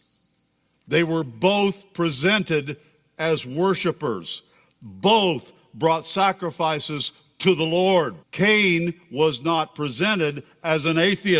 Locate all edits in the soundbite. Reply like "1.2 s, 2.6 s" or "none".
8.2 s